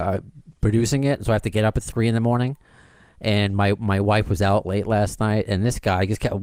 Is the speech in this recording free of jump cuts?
yes; 0 cuts

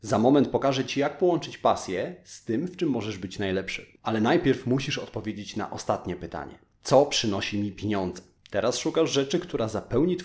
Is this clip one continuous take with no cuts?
yes; 0 cuts

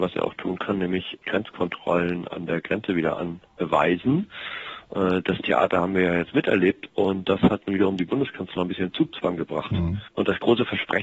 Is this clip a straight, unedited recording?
no; 1 cut; at 1.2 s

